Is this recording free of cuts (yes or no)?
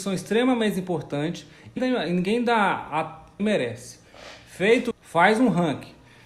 no